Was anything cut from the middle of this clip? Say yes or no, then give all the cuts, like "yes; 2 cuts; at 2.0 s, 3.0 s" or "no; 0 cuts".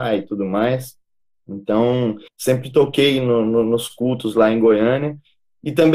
yes; 1 cut; at 2.3 s